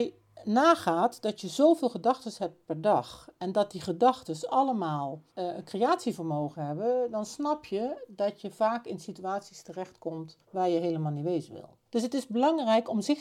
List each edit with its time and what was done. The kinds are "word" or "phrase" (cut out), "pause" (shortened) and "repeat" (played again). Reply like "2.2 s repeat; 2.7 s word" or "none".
5.3 s pause; 10.4 s pause; 11.9 s pause